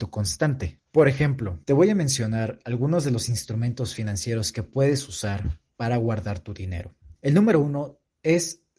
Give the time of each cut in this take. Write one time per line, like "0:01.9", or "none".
0:01.6
0:07.2